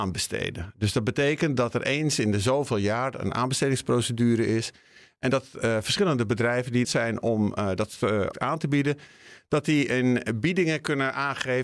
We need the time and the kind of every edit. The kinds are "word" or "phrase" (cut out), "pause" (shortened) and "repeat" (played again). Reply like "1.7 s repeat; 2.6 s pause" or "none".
6.8 s phrase; 8.3 s phrase